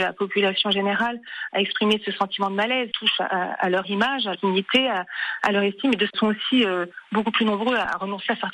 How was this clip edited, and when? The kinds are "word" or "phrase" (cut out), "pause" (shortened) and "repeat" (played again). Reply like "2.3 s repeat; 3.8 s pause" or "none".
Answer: 2.9 s word; 4.3 s word; 6.1 s word

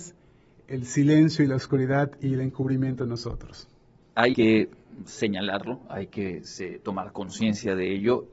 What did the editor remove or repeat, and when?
4.3 s word

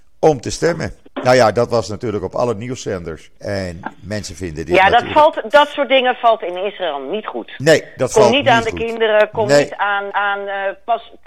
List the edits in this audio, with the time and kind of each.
1.1 s pause; 3.4 s pause; 5.5 s word; 10.1 s repeat

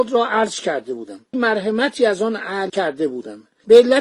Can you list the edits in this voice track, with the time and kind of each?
1.3 s word; 2.7 s word

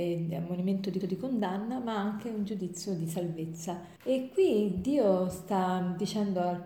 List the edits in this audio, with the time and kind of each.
1.0 s repeat; 4.0 s pause

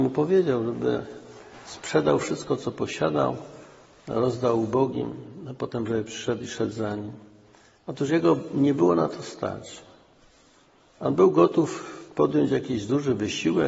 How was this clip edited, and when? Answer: none

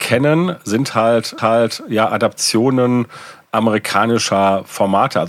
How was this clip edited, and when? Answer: 1.4 s repeat

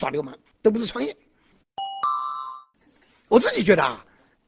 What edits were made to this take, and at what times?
none

